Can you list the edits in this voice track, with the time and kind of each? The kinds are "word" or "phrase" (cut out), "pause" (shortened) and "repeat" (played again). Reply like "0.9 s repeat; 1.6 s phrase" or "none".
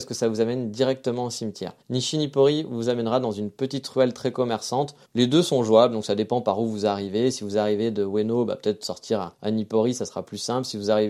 1.8 s pause; 5.1 s pause; 9.3 s pause